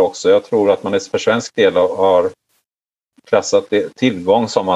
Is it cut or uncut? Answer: uncut